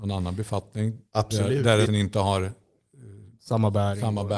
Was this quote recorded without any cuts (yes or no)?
no